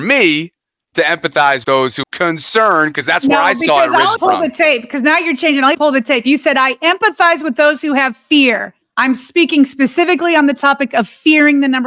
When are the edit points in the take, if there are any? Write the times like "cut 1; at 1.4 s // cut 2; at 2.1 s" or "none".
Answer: cut 1; at 1.6 s // cut 2; at 2.0 s // cut 3; at 4.2 s // cut 4; at 5.7 s